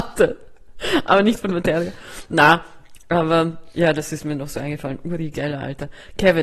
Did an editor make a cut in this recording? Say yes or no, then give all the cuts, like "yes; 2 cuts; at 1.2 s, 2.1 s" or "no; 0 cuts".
no; 0 cuts